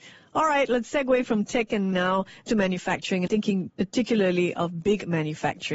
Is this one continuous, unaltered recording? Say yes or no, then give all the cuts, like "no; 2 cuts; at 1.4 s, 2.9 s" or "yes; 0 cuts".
no; 3 cuts; at 1.9 s, 2.5 s, 3.3 s